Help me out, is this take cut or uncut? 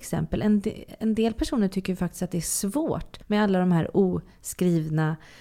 cut